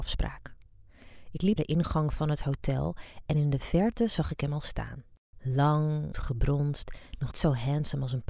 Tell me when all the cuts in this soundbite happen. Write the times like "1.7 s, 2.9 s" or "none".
1.6 s, 6.1 s, 7.3 s

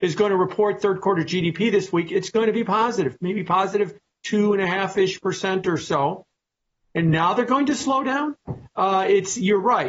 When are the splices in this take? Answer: none

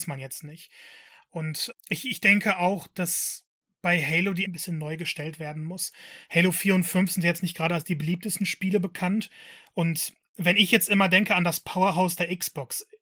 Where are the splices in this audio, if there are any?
1.7 s, 3.6 s, 4.5 s

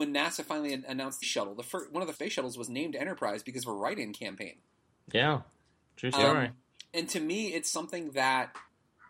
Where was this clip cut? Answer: 1.2 s, 2.1 s, 6.9 s

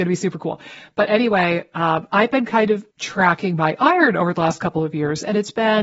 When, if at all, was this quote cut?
2.9 s

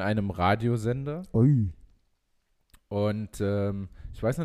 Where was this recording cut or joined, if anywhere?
none

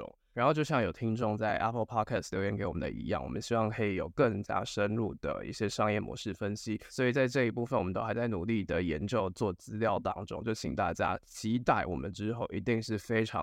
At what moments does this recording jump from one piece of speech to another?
none

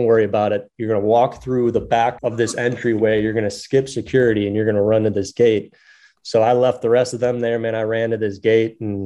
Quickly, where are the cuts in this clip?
2.2 s

